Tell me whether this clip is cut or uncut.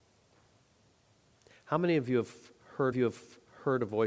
cut